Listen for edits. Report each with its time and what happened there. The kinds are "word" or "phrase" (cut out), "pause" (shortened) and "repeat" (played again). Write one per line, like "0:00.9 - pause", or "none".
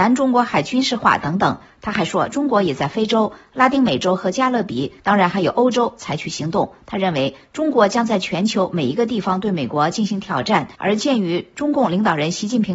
0:05.0 - pause
0:10.7 - pause